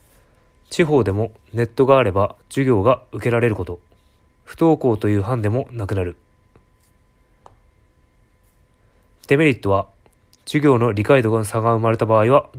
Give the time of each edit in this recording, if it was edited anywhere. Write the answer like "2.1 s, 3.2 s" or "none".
2.4 s, 4.2 s